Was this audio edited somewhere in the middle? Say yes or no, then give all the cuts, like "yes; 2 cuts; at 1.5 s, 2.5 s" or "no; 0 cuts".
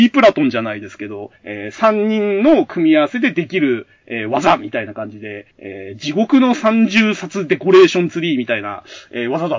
yes; 2 cuts; at 1.4 s, 5.5 s